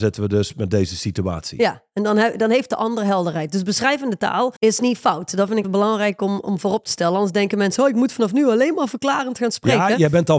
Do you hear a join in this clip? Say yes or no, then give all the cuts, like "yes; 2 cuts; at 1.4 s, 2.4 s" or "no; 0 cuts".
yes; 2 cuts; at 4.6 s, 5.6 s